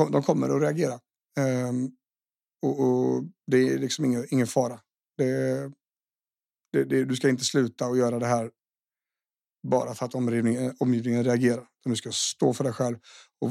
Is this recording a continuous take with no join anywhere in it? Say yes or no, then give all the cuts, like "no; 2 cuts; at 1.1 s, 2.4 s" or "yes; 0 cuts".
yes; 0 cuts